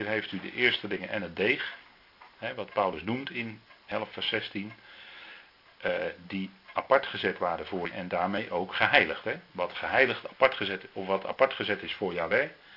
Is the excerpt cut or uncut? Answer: cut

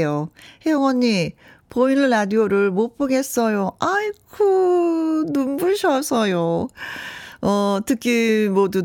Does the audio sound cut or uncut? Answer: uncut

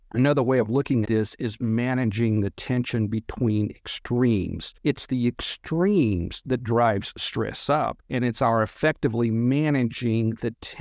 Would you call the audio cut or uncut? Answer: cut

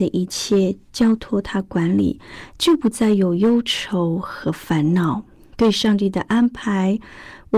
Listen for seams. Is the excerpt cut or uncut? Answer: cut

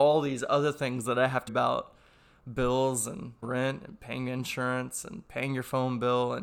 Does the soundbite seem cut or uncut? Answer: cut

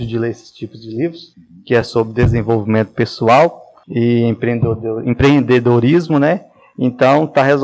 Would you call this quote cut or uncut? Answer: uncut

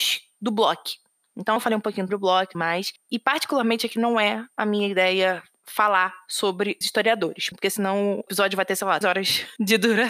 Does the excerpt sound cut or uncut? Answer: cut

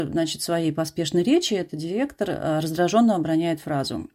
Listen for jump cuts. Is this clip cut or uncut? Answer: uncut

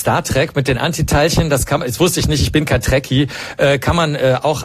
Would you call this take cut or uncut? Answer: uncut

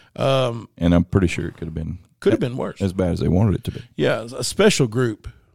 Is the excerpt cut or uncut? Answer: uncut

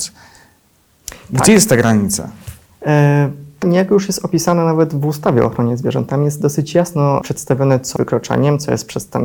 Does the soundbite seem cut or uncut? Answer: cut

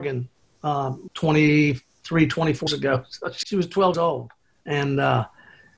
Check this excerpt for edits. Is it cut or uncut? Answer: cut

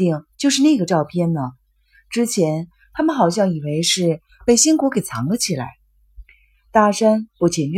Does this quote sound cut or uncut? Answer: uncut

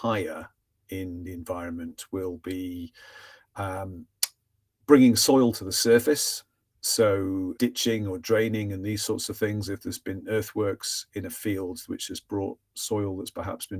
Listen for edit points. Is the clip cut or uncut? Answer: cut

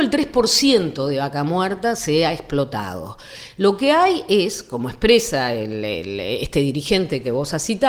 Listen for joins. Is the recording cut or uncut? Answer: uncut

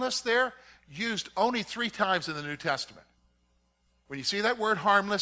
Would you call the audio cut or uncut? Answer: uncut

